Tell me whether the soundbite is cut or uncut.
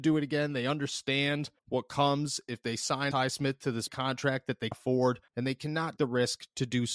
cut